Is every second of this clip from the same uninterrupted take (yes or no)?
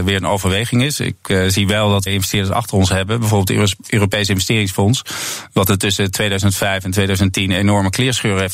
no